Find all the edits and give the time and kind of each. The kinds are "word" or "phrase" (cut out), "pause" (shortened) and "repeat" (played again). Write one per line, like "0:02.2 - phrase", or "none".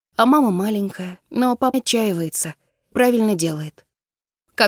0:01.2 - pause
0:01.7 - word
0:02.9 - word